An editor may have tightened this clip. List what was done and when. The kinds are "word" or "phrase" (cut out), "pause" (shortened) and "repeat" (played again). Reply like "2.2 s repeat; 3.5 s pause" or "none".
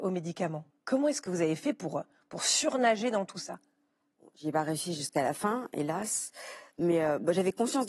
none